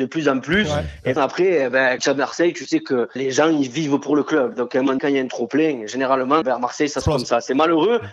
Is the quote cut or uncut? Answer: cut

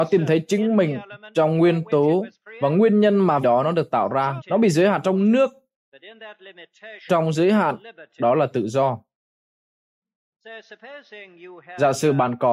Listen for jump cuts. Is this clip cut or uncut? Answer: cut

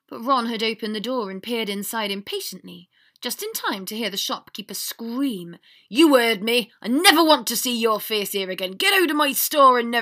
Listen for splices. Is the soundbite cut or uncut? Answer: uncut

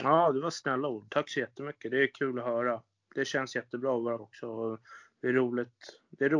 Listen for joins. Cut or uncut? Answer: cut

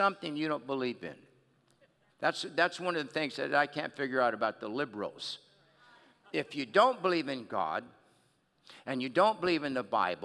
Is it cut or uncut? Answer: uncut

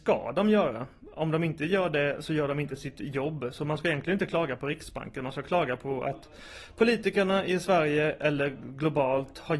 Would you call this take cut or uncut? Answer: uncut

